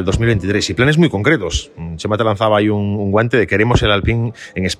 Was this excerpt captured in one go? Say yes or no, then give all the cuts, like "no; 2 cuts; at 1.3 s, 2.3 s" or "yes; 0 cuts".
yes; 0 cuts